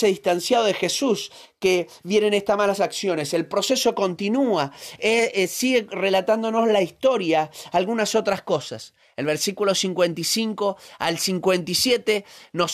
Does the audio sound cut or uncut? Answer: uncut